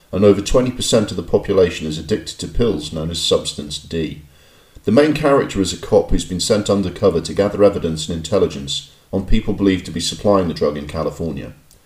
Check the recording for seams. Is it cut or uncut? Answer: uncut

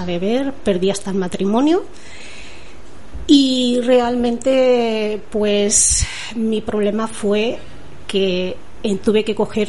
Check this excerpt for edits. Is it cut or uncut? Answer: uncut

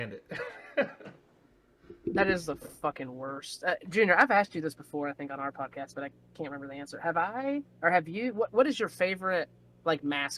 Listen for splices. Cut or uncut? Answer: uncut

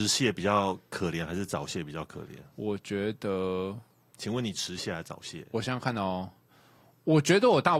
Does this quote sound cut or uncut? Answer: uncut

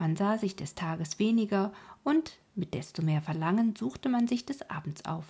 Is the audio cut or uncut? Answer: uncut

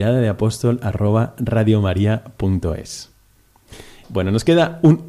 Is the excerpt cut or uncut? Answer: uncut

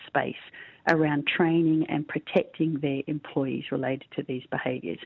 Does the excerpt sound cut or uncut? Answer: uncut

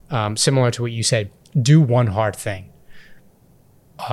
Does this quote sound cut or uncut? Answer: uncut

